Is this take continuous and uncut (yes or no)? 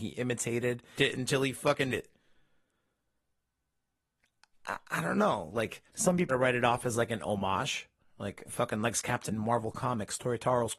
no